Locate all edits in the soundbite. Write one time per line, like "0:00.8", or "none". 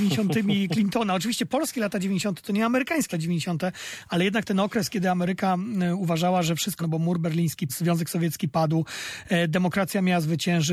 0:03.1
0:06.8
0:07.7